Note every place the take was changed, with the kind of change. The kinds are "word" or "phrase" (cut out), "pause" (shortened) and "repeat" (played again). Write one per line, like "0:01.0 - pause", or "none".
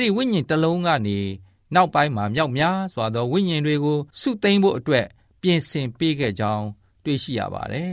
0:04.1 - pause